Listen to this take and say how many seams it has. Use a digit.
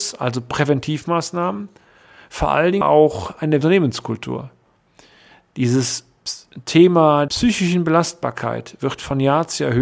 3